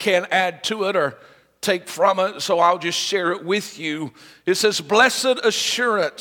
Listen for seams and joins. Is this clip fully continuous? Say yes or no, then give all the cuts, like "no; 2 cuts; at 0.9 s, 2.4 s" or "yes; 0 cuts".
yes; 0 cuts